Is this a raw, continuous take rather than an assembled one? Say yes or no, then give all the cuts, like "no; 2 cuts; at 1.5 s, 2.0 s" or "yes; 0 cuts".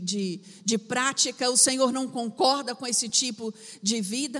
yes; 0 cuts